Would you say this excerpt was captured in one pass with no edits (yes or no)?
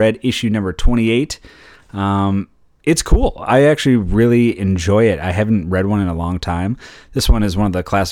yes